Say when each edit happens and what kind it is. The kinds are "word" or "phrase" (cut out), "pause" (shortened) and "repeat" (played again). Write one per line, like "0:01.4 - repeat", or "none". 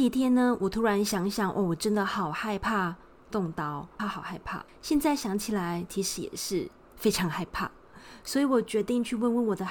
0:04.0 - phrase
0:04.7 - pause